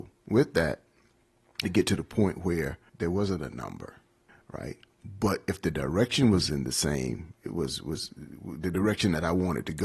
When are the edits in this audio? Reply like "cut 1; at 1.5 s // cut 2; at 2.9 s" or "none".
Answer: cut 1; at 1.6 s // cut 2; at 2.9 s // cut 3; at 4.3 s